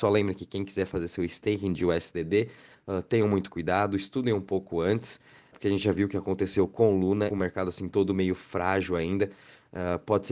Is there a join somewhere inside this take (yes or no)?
yes